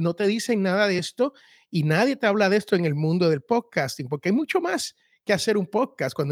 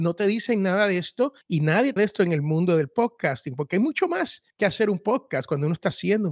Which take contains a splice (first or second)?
second